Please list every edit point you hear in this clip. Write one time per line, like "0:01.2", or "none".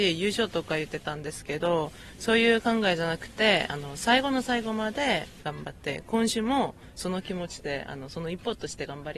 none